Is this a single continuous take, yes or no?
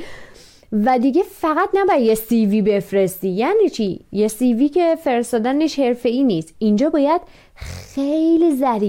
yes